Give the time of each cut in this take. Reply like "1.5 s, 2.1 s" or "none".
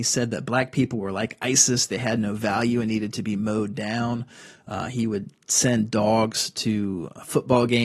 none